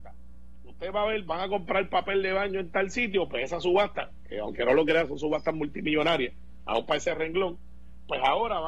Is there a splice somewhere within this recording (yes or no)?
no